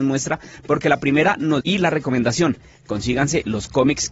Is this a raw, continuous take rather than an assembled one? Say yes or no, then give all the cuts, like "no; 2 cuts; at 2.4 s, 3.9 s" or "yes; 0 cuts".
no; 1 cut; at 1.6 s